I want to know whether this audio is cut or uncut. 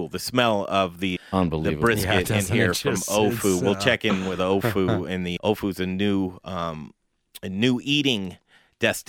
cut